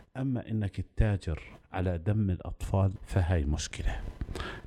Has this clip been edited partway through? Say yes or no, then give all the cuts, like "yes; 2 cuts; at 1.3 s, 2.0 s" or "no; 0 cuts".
no; 0 cuts